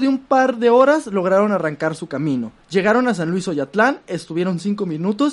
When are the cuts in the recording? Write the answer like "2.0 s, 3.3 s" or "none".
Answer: 2.6 s